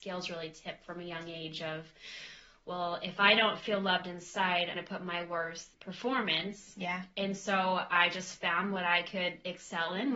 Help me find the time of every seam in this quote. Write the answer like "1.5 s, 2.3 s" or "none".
4.7 s, 5.7 s